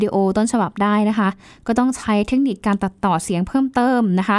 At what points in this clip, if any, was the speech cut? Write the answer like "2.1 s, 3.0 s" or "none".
none